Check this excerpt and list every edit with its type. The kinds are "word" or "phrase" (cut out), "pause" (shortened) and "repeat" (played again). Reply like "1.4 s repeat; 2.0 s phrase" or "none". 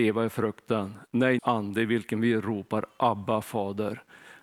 1.4 s phrase